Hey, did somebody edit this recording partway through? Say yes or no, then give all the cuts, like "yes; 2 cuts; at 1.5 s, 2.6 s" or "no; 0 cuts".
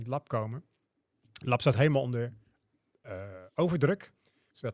no; 0 cuts